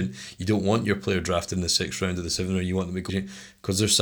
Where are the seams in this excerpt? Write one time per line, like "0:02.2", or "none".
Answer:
0:03.1